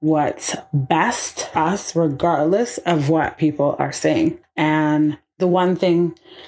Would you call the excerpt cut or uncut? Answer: cut